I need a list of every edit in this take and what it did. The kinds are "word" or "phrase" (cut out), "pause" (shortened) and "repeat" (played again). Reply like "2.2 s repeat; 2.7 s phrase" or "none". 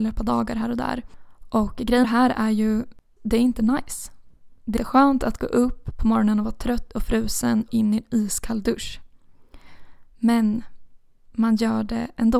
2.0 s word; 3.2 s word; 4.8 s word; 7.7 s word